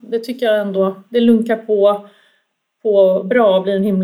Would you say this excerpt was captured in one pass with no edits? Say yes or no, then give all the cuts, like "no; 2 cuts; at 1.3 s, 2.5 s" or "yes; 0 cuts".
yes; 0 cuts